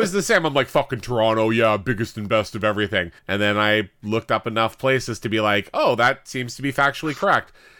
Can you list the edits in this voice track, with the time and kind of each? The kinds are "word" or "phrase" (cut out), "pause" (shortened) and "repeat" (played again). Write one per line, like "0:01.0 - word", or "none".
0:03.2 - pause

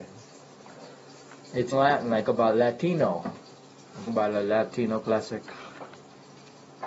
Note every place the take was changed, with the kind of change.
0:01.7 - word
0:02.2 - word
0:04.1 - word

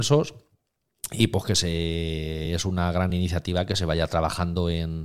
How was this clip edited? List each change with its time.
none

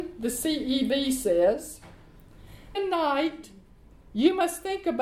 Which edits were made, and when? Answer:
0:02.7 - word

